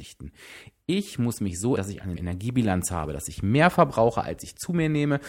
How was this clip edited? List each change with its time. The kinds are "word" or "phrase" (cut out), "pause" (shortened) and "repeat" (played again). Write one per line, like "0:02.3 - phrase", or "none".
0:01.8 - word
0:02.2 - word